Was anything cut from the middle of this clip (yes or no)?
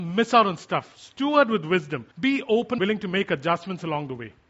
yes